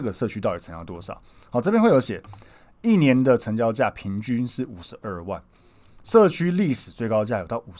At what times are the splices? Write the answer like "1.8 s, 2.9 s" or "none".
none

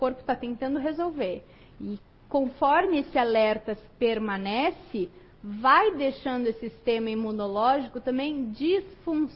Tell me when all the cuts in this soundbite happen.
none

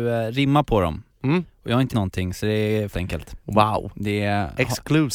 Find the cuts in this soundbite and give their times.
1.9 s, 2.9 s

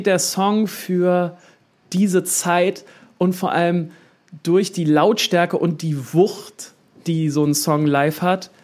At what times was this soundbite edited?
none

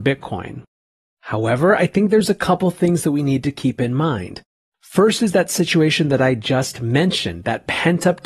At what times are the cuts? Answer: none

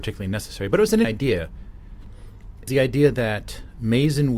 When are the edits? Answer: 1.0 s, 2.7 s

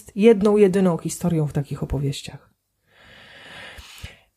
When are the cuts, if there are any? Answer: none

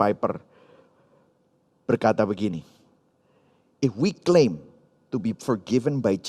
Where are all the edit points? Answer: none

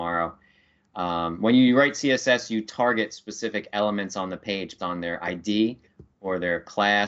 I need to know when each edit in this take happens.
4.8 s

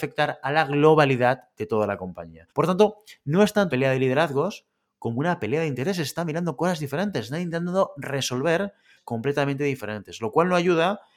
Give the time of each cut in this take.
2.5 s, 3.7 s, 9.0 s

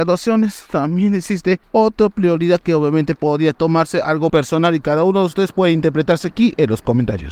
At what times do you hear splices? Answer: 1.6 s, 4.3 s

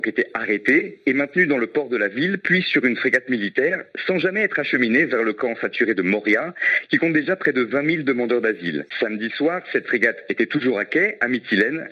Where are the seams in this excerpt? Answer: 8.9 s

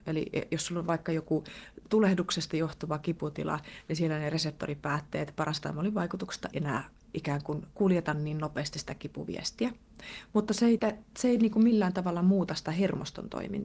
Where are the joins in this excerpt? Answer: 1.9 s, 6.5 s, 10.8 s

